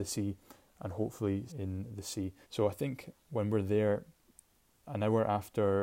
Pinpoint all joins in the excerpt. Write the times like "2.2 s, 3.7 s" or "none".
1.5 s, 2.4 s